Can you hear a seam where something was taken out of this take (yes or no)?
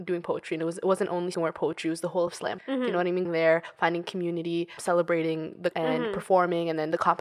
yes